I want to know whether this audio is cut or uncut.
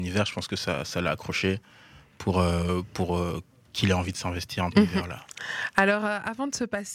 cut